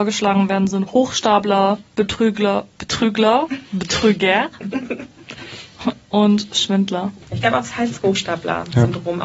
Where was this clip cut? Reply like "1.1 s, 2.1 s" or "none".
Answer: 1.9 s, 7.2 s